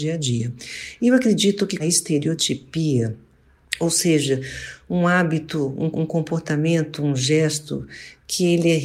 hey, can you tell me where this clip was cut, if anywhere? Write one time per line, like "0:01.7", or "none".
0:01.8
0:05.9